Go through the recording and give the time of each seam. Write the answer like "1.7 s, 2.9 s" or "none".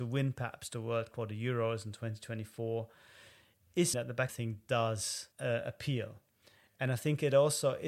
1.1 s, 3.9 s, 4.3 s, 5.3 s